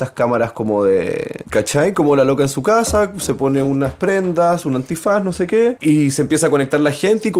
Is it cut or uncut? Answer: uncut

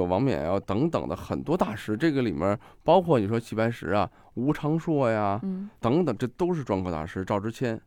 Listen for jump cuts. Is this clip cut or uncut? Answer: uncut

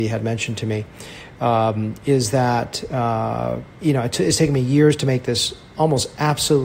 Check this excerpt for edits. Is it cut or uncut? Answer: cut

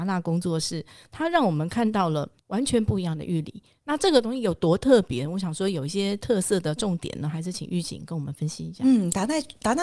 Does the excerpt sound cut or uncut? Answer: cut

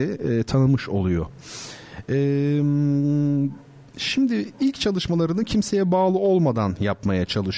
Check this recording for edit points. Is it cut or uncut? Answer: uncut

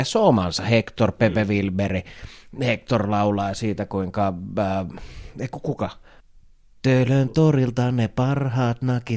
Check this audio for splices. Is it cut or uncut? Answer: cut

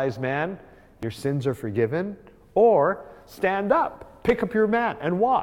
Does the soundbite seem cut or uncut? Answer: uncut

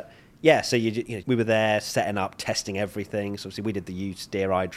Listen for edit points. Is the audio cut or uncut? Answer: cut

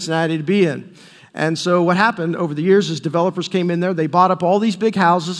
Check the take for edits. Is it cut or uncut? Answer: uncut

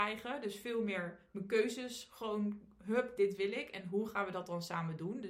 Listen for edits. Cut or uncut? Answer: cut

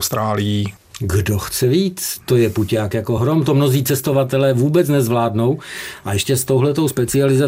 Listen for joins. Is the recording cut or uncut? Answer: uncut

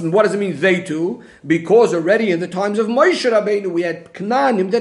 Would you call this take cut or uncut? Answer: uncut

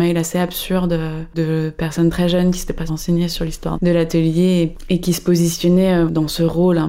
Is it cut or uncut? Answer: cut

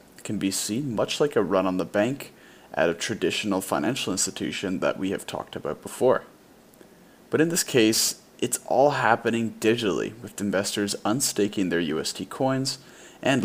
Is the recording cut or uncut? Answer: uncut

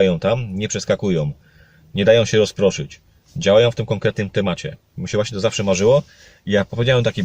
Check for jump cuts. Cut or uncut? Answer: uncut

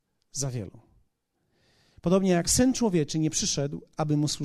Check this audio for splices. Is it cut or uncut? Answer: uncut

